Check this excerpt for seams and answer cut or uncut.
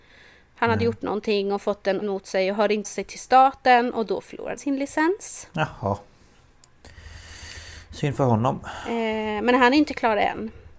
cut